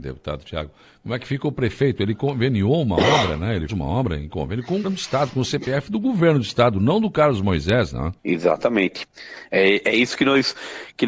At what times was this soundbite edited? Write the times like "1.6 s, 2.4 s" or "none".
3.7 s, 4.8 s, 8.2 s